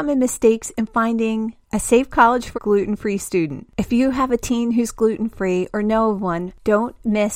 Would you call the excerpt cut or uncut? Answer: cut